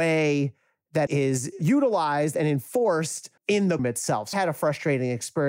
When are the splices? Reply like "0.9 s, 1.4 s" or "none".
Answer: 1.1 s, 3.4 s, 3.8 s, 4.3 s